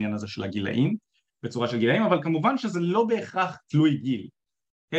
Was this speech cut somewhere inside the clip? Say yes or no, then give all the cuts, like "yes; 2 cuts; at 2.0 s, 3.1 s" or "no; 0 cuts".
no; 0 cuts